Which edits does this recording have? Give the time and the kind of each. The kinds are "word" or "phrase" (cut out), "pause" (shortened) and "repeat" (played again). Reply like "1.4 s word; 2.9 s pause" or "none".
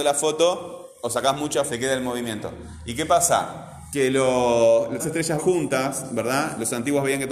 1.7 s word; 5.0 s word; 5.4 s word